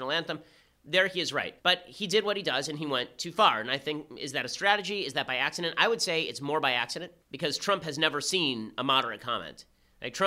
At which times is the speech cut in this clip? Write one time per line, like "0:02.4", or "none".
0:01.6
0:07.2